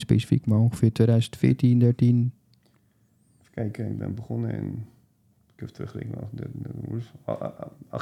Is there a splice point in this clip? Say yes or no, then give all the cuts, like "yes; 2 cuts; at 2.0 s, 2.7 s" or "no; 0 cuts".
no; 0 cuts